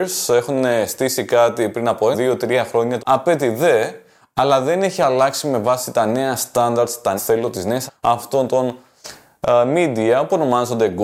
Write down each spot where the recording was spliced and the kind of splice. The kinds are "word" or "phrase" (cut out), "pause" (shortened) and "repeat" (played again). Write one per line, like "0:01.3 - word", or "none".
0:02.1 - word
0:03.0 - word
0:07.2 - word
0:07.9 - word